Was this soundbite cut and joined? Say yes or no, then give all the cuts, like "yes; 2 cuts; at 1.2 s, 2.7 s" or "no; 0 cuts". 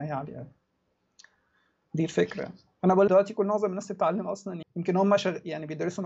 yes; 2 cuts; at 3.1 s, 4.6 s